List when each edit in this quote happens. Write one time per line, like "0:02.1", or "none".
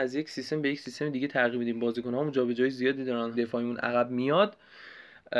0:03.3